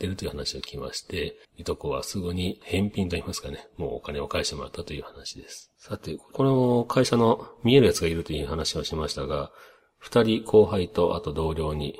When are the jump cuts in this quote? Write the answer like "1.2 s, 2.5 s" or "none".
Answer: 1.4 s, 5.8 s